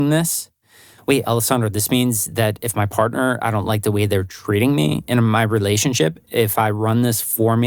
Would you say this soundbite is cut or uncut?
uncut